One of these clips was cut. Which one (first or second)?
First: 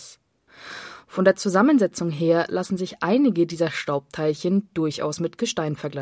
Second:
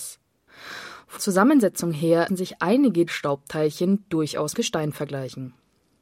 second